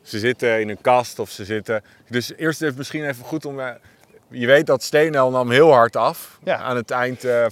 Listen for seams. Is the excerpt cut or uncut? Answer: uncut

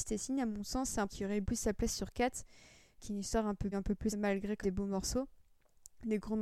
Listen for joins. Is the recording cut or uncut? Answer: cut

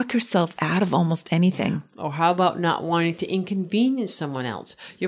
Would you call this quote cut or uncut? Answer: uncut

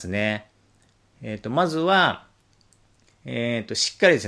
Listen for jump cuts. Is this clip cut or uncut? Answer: uncut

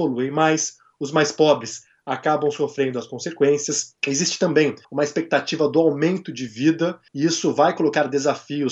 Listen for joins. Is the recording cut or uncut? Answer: cut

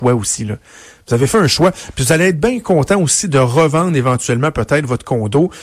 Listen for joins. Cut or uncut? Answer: uncut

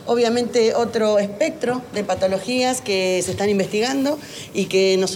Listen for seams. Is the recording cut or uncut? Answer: uncut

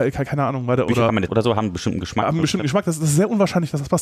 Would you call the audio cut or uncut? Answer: cut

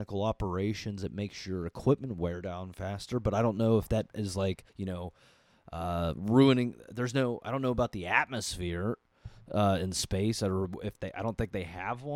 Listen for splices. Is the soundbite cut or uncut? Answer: cut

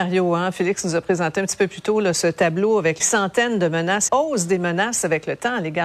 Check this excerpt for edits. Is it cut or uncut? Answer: cut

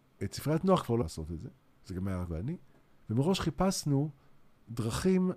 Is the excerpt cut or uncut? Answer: cut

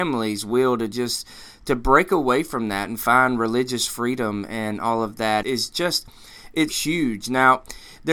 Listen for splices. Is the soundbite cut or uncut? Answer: cut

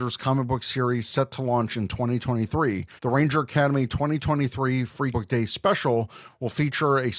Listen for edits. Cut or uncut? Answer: cut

